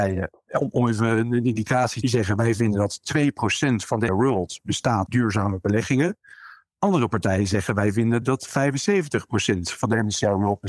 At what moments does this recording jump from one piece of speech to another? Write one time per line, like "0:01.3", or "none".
0:02.0
0:04.1
0:05.1
0:08.2

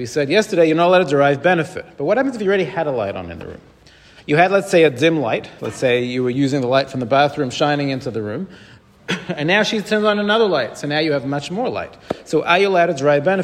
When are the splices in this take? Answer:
none

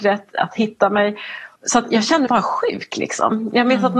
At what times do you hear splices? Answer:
0:01.6
0:02.3

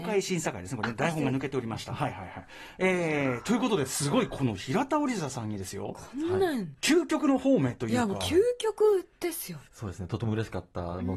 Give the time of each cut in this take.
0:09.7

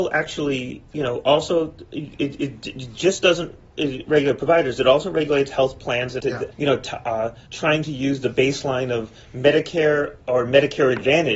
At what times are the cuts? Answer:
0:06.2
0:06.5
0:07.5

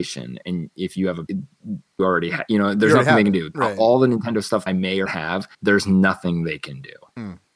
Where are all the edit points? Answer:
0:01.3
0:02.0
0:04.7
0:05.1
0:05.5

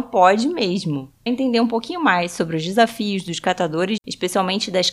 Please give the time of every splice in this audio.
0:01.3
0:04.0

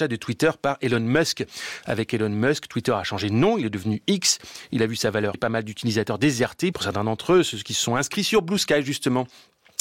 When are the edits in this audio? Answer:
0:05.3
0:06.7

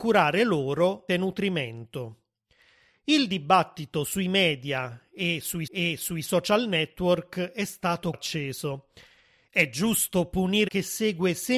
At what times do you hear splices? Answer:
0:01.1
0:05.7
0:08.1
0:10.7

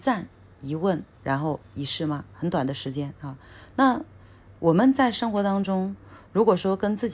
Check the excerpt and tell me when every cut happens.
0:01.1

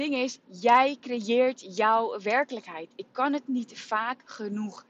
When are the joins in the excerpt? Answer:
none

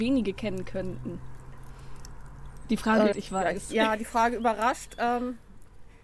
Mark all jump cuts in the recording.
0:03.1

